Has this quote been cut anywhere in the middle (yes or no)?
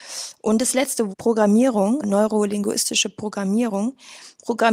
yes